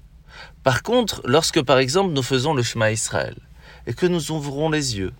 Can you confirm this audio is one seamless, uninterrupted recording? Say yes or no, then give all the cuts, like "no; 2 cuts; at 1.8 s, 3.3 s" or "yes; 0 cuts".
yes; 0 cuts